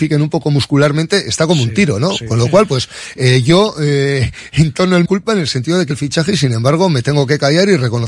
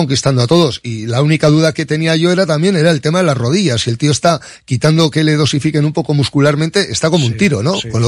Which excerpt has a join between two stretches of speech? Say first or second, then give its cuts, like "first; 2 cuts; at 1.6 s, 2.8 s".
first; 2 cuts; at 5.1 s, 5.9 s